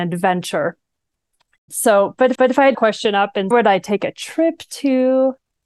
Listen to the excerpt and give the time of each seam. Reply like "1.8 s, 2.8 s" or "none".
2.3 s, 2.7 s, 3.5 s